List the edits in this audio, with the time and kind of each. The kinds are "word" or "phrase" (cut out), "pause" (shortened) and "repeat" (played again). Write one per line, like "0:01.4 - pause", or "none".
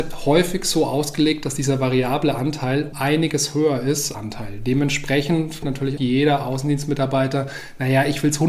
0:02.9 - word
0:04.1 - phrase
0:05.6 - word
0:06.0 - word